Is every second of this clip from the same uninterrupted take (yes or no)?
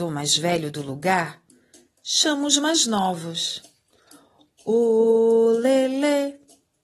yes